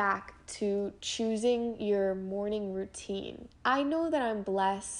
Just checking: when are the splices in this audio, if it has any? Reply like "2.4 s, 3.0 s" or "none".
3.6 s